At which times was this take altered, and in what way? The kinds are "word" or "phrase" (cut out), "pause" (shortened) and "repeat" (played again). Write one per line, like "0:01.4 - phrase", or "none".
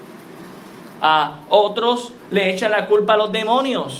none